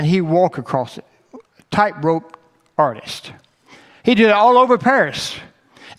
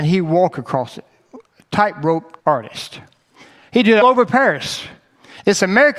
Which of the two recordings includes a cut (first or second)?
second